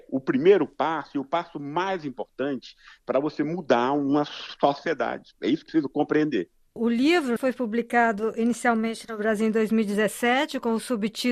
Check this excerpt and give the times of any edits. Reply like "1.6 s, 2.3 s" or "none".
5.7 s, 7.4 s